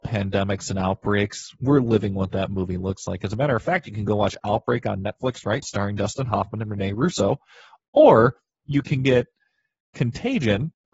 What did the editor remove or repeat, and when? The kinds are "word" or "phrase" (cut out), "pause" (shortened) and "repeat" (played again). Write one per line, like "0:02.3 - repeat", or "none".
0:05.6 - word